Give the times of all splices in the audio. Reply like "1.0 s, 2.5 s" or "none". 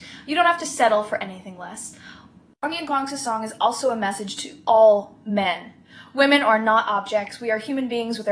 none

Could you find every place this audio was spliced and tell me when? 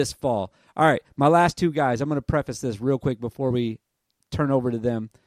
none

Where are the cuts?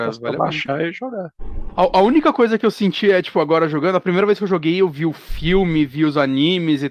none

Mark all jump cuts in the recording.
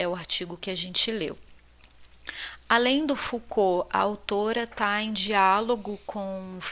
none

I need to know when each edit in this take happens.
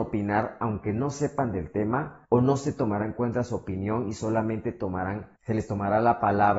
2.3 s, 5.4 s

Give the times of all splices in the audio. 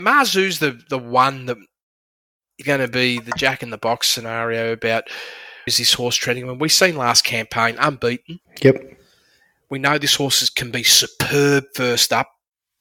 2.6 s, 5.7 s, 8.5 s

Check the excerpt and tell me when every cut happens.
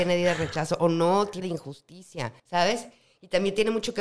1.4 s, 2.4 s

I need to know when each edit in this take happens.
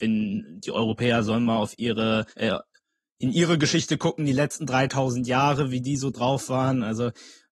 2.3 s

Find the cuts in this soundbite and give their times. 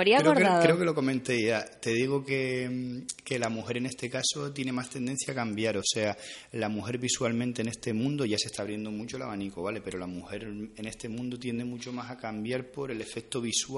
none

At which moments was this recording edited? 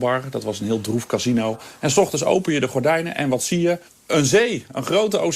3.9 s

